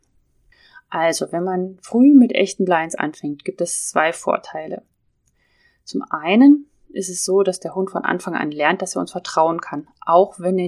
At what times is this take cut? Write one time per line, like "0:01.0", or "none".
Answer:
none